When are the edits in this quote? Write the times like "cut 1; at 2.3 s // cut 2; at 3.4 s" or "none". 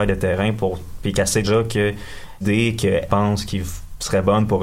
cut 1; at 1.4 s // cut 2; at 2.4 s // cut 3; at 3.1 s